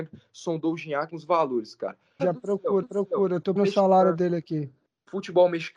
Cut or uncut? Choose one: cut